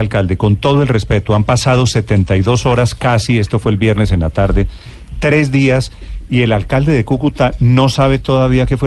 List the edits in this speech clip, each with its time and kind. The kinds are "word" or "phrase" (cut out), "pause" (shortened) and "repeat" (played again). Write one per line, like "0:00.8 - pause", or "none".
none